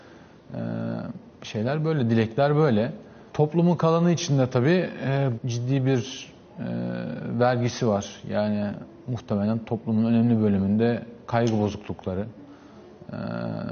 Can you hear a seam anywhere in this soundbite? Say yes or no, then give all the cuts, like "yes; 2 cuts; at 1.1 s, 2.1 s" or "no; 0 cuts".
yes; 3 cuts; at 1.3 s, 3.3 s, 5.3 s